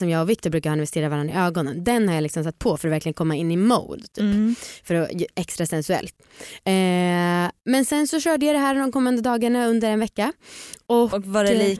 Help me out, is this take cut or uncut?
uncut